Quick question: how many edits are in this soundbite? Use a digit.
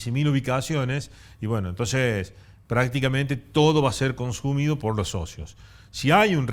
0